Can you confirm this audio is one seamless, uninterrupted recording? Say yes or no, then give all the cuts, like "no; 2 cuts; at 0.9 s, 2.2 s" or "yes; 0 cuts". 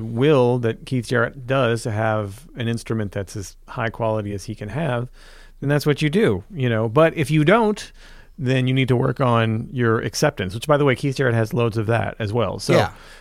yes; 0 cuts